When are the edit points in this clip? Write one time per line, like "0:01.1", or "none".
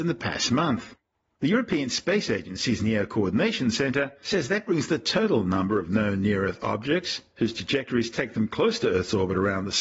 none